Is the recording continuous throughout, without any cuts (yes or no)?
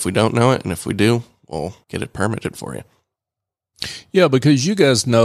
no